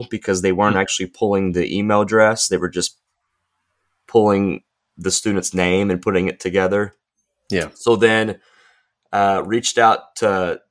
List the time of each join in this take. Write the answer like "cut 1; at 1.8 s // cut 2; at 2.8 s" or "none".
none